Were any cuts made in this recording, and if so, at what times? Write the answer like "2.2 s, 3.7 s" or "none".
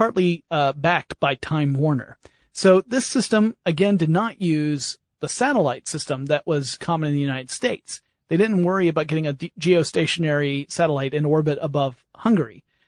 none